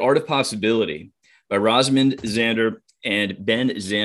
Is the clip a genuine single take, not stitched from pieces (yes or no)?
yes